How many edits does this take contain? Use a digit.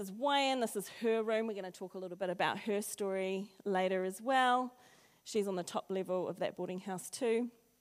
0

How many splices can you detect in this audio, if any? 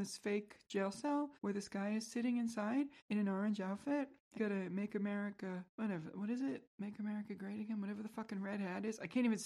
5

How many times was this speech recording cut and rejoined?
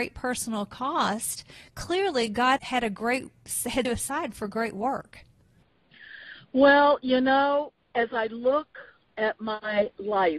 3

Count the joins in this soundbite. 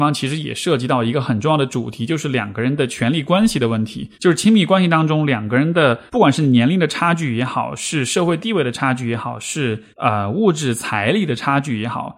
3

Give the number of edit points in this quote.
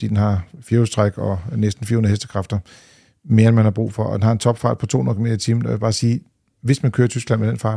0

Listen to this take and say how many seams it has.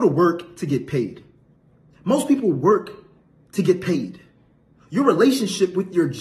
0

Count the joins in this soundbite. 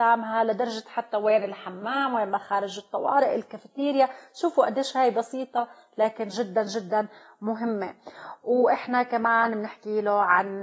0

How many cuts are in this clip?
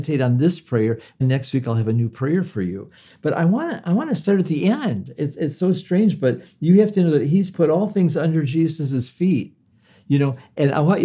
1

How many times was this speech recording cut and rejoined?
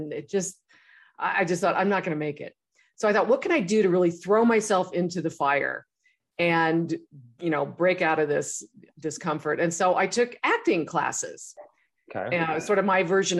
0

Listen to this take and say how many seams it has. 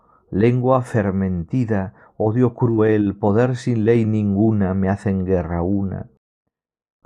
0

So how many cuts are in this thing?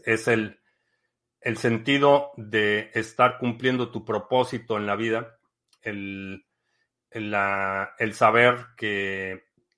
1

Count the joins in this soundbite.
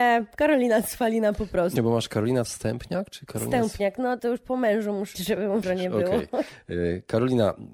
5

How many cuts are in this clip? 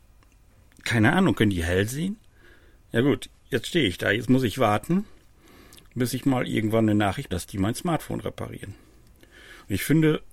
1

